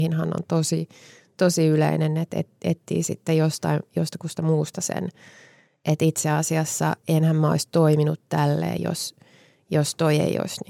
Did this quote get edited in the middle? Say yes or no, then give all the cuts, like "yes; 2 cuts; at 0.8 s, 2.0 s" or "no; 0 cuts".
no; 0 cuts